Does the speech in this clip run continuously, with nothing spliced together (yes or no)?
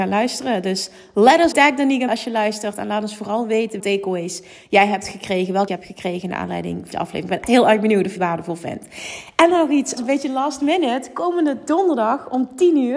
no